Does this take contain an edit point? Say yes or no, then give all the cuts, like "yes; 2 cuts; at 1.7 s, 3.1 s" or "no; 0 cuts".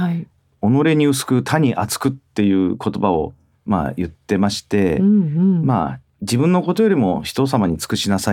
no; 0 cuts